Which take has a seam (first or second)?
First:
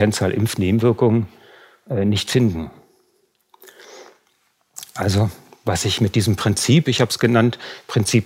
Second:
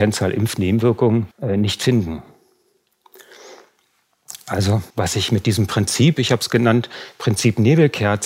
second